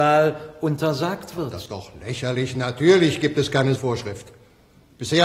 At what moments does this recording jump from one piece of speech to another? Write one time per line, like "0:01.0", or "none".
0:01.7
0:03.8